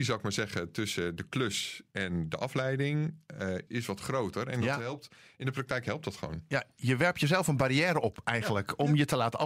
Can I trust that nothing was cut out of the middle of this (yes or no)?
no